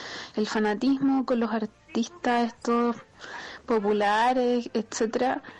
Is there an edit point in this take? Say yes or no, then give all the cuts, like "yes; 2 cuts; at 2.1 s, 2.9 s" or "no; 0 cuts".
no; 0 cuts